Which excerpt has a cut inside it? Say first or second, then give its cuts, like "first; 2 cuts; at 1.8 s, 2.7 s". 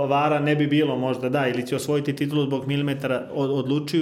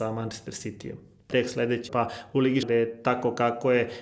second; 3 cuts; at 1.3 s, 1.9 s, 2.6 s